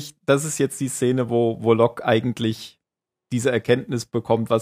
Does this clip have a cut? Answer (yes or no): no